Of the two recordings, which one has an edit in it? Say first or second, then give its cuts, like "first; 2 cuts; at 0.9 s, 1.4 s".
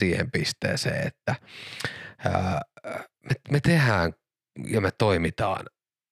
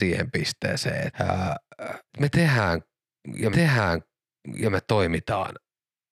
second; 3 cuts; at 1.1 s, 2.1 s, 3.5 s